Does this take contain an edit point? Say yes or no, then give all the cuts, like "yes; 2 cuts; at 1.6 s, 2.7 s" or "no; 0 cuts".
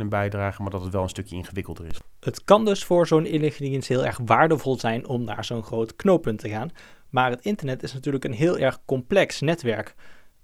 no; 0 cuts